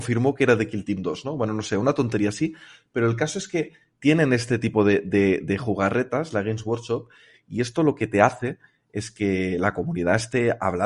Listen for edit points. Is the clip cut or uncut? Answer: uncut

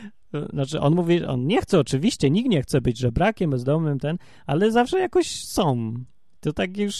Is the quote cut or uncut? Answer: uncut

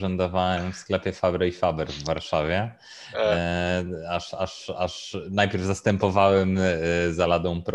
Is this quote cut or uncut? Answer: uncut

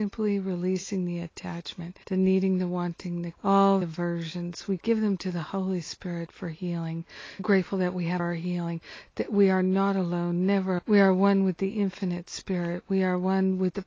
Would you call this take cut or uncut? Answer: cut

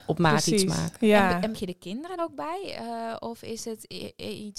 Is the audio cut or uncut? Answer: cut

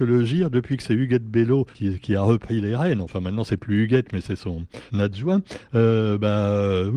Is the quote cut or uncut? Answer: cut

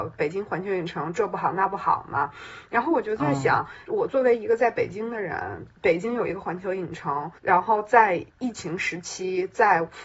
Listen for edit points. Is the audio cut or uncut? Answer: cut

